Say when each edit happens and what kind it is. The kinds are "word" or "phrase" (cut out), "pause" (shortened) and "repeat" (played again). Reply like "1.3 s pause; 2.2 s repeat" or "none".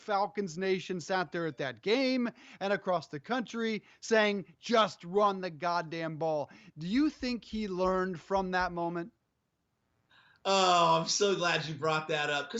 none